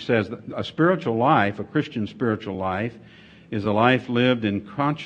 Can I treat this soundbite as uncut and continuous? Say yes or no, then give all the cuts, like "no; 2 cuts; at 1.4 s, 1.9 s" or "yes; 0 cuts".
yes; 0 cuts